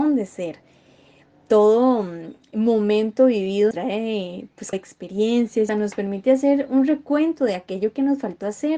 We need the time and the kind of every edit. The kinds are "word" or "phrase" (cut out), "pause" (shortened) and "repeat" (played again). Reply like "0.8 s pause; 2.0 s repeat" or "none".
3.7 s word; 4.7 s word; 5.7 s word